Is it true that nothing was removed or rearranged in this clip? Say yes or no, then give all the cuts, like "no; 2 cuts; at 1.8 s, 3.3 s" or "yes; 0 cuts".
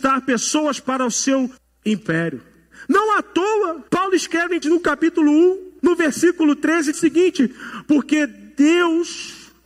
no; 5 cuts; at 1.6 s, 3.9 s, 4.6 s, 5.8 s, 6.9 s